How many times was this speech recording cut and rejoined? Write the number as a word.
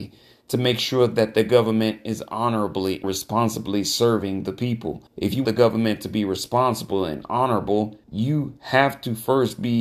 four